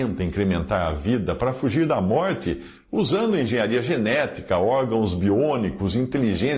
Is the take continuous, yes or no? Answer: yes